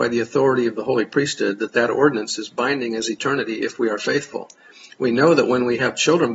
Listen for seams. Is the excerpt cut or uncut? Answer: uncut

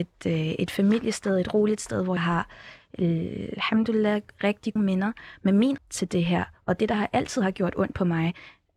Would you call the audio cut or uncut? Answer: cut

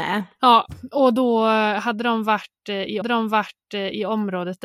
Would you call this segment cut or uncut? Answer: cut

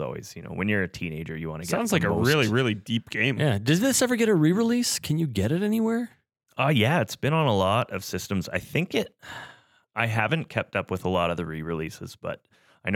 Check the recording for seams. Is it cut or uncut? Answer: uncut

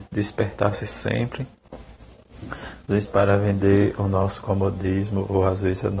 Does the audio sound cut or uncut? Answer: uncut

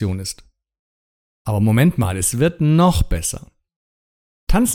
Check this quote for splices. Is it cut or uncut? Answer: uncut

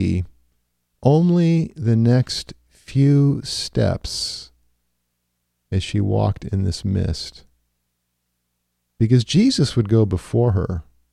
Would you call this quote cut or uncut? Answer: uncut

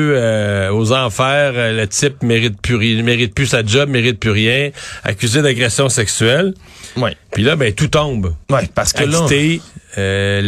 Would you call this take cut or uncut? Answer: cut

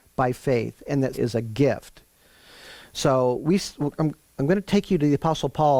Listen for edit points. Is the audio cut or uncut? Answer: cut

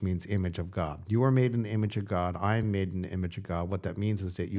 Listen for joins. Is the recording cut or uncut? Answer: uncut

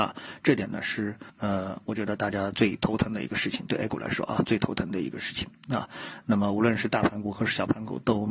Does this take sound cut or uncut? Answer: cut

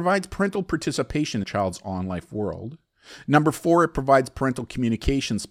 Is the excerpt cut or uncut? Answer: cut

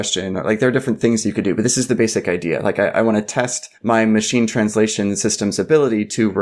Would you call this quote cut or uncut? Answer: cut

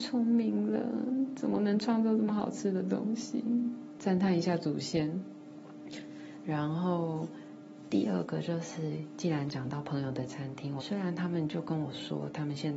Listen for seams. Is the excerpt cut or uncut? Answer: cut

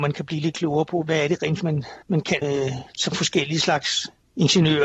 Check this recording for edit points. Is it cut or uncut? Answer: cut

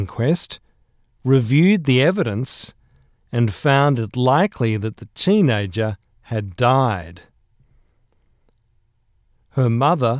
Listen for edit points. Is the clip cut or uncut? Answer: uncut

